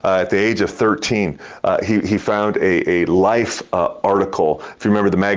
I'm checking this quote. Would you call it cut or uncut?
uncut